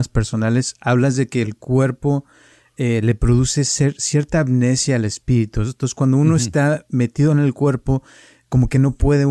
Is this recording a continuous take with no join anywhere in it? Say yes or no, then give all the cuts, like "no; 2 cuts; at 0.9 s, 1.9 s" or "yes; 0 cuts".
yes; 0 cuts